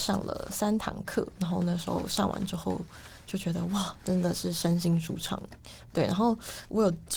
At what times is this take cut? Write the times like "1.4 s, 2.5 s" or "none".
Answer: 5.9 s